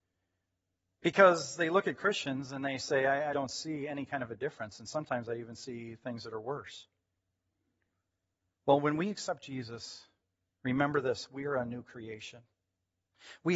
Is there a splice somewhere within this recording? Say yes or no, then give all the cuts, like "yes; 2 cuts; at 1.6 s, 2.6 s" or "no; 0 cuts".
yes; 1 cut; at 3.3 s